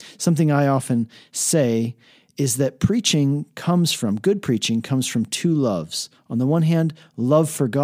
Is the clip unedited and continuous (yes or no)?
yes